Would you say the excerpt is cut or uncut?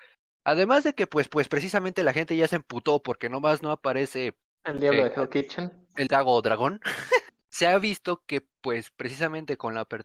cut